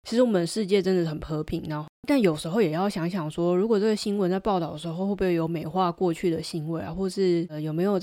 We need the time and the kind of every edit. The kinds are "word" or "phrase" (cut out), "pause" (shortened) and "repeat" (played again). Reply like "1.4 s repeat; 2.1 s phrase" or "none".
2.0 s pause

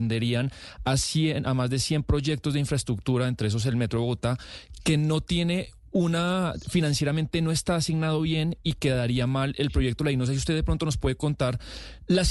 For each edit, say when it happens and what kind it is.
none

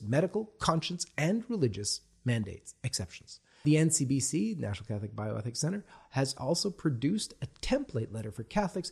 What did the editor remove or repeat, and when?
none

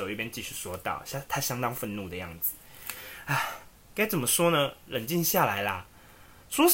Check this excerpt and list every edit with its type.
3.7 s word

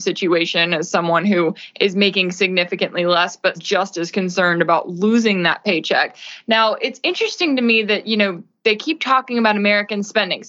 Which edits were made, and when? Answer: 3.6 s word

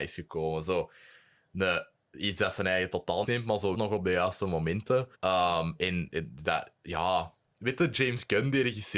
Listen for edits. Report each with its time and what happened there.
3.2 s phrase; 3.7 s word; 5.1 s pause

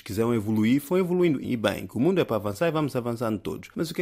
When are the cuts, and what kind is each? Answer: 1.4 s word

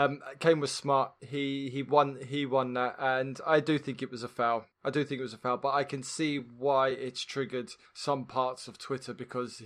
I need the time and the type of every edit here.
none

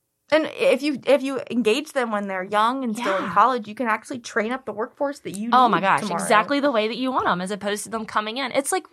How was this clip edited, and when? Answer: none

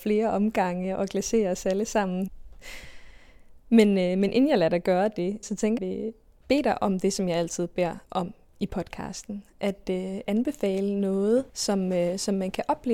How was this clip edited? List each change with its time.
5.4 s word; 5.8 s phrase; 8.0 s pause; 10.3 s word; 11.5 s pause

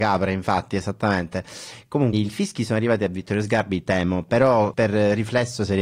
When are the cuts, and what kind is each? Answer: 2.1 s word; 4.7 s word

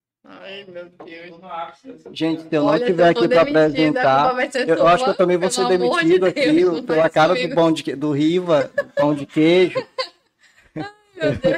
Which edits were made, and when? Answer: none

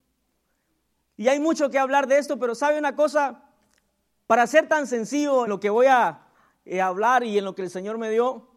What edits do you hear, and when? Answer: 5.5 s word

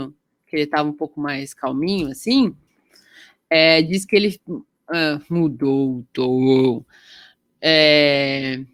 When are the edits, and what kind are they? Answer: none

